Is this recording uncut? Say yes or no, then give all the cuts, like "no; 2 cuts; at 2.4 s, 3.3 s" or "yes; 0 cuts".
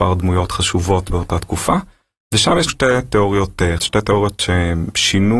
no; 3 cuts; at 1.1 s, 2.7 s, 3.8 s